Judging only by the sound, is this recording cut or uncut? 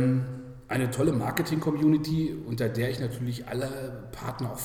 uncut